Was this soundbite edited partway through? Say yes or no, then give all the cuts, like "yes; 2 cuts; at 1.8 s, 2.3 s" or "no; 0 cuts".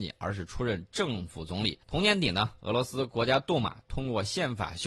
yes; 1 cut; at 1.8 s